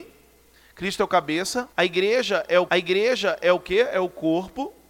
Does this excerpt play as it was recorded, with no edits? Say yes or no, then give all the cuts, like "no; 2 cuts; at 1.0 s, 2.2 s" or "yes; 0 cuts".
no; 2 cuts; at 1.7 s, 2.7 s